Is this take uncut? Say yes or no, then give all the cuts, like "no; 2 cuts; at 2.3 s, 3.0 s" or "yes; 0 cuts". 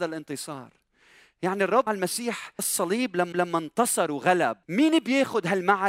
no; 4 cuts; at 1.9 s, 2.6 s, 3.3 s, 4.6 s